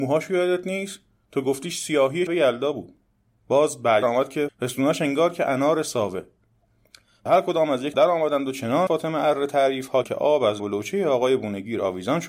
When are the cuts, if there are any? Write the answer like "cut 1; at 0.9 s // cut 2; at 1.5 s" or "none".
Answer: cut 1; at 2.3 s // cut 2; at 4.0 s // cut 3; at 4.5 s // cut 4; at 7.3 s // cut 5; at 7.9 s // cut 6; at 8.9 s // cut 7; at 10.0 s // cut 8; at 10.6 s